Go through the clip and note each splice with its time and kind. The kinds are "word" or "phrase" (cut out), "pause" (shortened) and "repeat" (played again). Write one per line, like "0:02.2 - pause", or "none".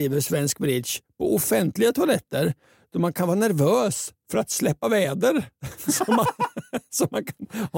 none

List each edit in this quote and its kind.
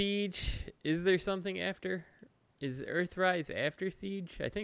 none

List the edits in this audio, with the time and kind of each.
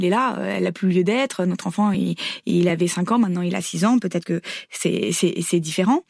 none

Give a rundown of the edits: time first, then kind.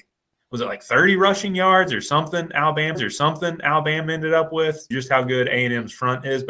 0:02.9 - repeat
0:04.9 - phrase

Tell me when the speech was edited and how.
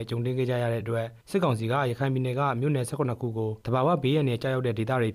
0:01.2 - pause
0:03.6 - pause

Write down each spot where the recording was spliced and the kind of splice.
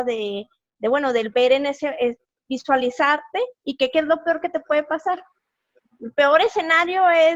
0:03.5 - pause

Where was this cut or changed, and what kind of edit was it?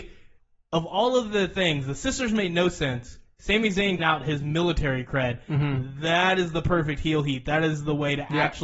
0:04.0 - word

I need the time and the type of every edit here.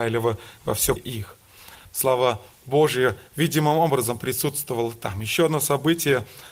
0:01.0 - word
0:01.9 - pause

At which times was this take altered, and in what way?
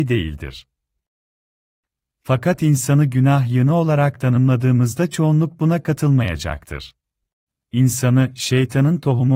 0:07.5 - pause

